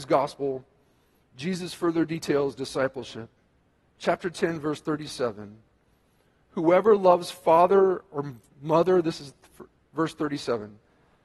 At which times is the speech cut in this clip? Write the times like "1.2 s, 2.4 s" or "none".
none